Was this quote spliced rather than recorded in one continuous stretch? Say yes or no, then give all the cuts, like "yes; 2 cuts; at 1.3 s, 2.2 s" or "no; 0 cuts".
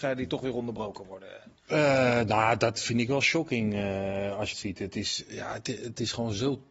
yes; 1 cut; at 4.5 s